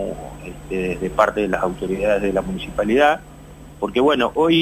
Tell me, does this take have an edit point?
yes; 1 cut; at 3.7 s

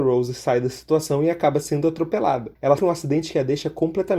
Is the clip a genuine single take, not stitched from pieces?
no; 1 cut; at 2.8 s

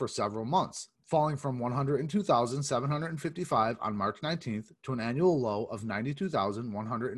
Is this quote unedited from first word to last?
yes; 0 cuts

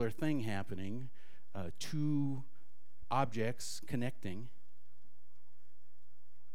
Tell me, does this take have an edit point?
yes; 1 cut; at 3.0 s

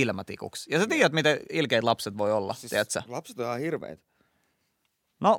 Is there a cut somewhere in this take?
no; 0 cuts

